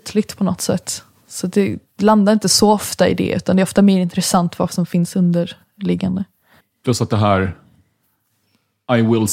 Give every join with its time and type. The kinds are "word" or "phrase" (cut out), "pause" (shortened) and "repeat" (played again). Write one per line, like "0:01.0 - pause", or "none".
0:06.6 - pause